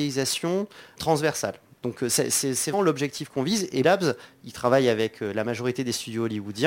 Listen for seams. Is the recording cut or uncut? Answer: cut